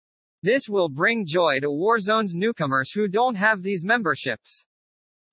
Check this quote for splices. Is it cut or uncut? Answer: uncut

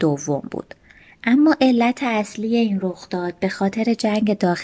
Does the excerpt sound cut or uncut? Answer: cut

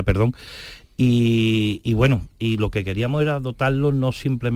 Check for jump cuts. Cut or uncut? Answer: uncut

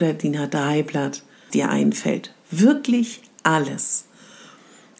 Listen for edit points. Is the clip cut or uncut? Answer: cut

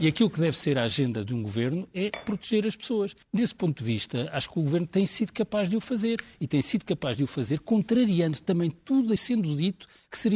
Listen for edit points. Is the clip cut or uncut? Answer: cut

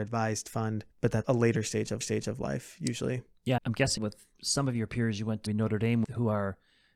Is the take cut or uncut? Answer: cut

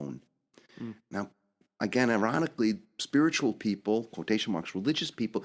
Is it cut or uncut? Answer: uncut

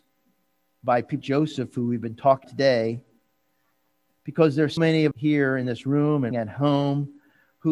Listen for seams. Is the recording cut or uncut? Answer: cut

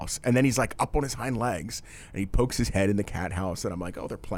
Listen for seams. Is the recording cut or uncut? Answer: uncut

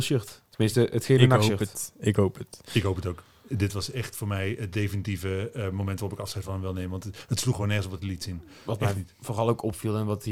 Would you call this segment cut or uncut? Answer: uncut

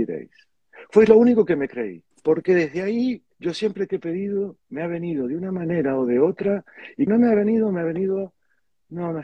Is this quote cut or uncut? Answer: cut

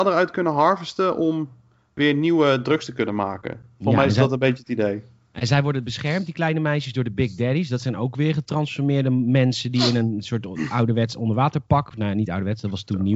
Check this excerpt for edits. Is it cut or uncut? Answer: uncut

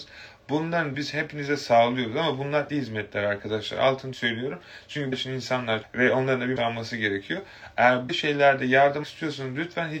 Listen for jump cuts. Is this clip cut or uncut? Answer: cut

